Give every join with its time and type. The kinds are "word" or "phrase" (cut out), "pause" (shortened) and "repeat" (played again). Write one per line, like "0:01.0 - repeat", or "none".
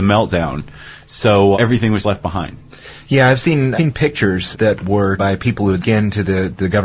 0:01.5 - word
0:02.0 - word
0:03.8 - word
0:04.5 - word
0:05.2 - word
0:05.8 - word